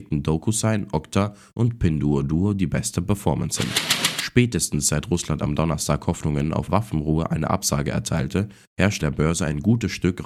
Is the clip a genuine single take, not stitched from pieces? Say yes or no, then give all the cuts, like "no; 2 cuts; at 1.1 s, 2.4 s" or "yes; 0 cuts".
no; 2 cuts; at 6.7 s, 9.0 s